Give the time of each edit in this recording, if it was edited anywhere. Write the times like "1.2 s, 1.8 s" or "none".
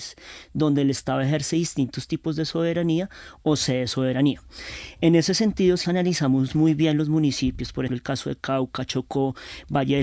5.8 s, 7.9 s